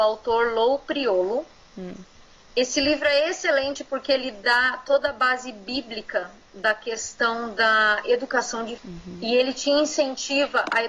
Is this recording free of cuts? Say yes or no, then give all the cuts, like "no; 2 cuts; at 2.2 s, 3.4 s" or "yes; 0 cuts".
no; 1 cut; at 8.8 s